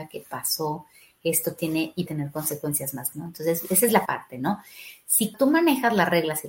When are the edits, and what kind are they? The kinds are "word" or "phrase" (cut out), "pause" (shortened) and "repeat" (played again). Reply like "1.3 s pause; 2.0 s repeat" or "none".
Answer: 2.1 s word; 3.1 s word; 4.1 s word; 5.3 s word